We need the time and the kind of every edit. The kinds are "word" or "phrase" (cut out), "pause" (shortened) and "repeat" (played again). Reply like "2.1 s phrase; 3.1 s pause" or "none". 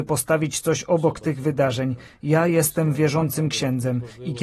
none